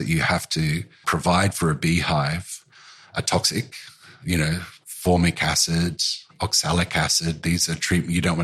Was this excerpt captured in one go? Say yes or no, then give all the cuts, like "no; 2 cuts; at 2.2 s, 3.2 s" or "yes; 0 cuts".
no; 1 cut; at 1.0 s